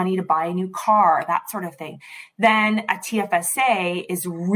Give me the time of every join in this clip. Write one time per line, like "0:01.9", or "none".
none